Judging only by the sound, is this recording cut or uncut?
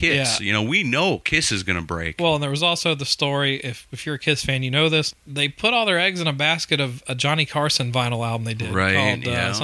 uncut